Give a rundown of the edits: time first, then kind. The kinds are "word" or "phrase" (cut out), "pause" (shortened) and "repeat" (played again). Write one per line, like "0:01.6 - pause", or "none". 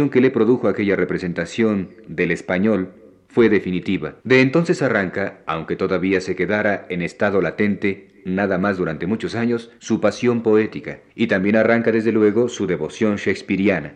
0:04.2 - pause
0:09.8 - pause
0:11.1 - pause